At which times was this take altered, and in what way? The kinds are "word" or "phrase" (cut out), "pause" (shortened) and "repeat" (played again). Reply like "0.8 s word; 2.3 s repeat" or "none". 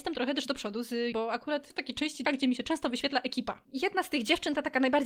1.1 s word; 1.7 s word; 2.3 s word